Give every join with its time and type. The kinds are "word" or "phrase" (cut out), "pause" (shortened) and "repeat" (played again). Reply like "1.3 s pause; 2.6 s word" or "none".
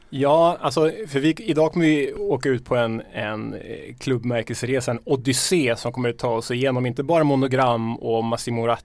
none